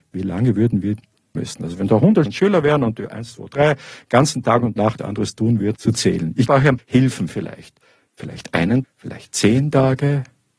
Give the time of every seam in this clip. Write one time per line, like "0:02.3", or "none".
0:01.4
0:02.3
0:04.4
0:05.0
0:05.7
0:06.5
0:06.8
0:08.8